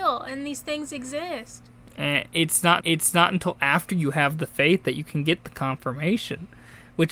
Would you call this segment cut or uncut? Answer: cut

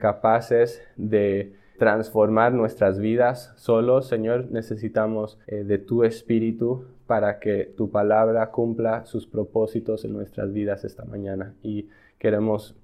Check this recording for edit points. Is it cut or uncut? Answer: cut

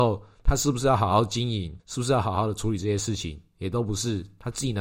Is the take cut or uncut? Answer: cut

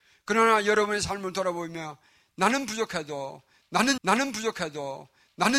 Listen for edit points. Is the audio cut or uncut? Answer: cut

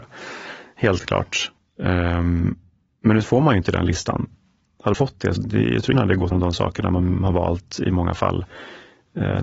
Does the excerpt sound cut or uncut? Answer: cut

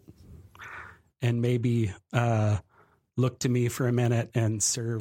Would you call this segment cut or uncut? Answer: uncut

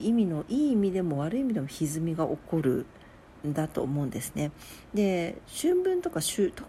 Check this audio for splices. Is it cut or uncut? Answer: uncut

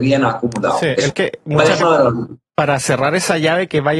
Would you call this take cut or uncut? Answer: cut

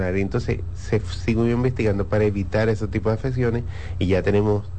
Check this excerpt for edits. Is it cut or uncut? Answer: uncut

